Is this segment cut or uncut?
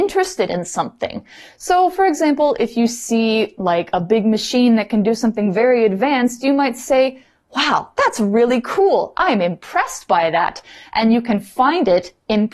uncut